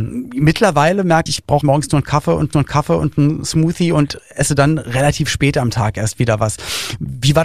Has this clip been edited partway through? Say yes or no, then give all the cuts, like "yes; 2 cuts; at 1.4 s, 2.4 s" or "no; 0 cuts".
yes; 3 cuts; at 1.3 s, 1.6 s, 2.5 s